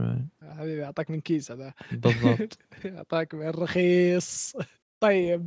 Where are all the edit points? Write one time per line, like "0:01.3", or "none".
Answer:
none